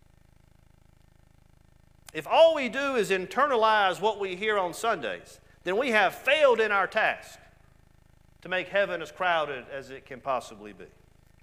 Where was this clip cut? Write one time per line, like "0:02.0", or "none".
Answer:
none